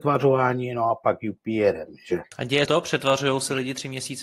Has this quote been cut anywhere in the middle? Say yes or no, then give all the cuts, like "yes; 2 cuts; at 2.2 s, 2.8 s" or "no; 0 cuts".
yes; 2 cuts; at 2.3 s, 2.6 s